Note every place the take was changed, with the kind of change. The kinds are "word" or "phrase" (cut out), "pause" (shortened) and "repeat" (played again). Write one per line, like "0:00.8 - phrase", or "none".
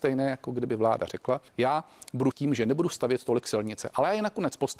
0:01.5 - pause
0:02.3 - word

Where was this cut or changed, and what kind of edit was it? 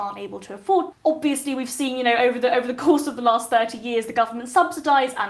0:00.9 - word

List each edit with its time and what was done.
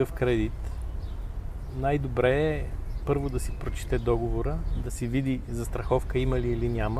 none

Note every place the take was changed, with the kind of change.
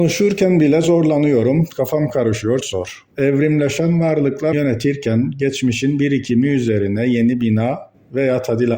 0:02.6 - phrase
0:03.1 - pause
0:04.5 - phrase

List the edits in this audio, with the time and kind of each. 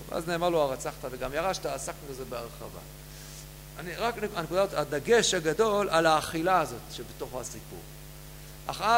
none

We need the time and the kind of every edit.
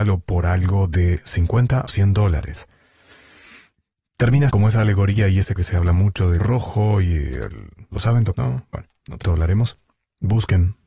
0:01.9 - word
0:04.5 - word
0:05.6 - word
0:06.4 - word
0:07.9 - word
0:08.3 - word
0:09.2 - word

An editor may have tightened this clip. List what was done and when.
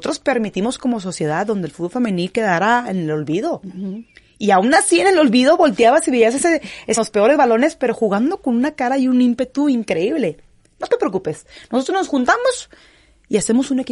0:07.0 - phrase

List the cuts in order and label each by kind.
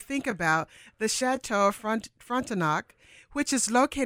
none

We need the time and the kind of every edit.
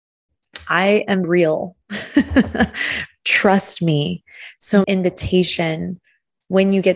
0:01.2 - word
0:04.8 - word

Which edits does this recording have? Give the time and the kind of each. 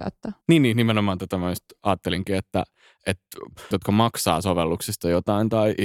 0:03.7 - phrase

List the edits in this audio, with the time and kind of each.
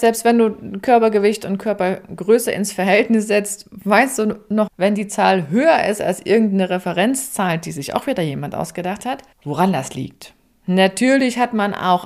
0:04.7 - word
0:09.3 - pause

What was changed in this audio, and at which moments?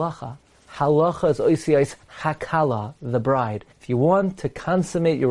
0:03.7 - pause

